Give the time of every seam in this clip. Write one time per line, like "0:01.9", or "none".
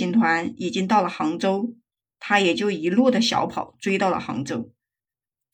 none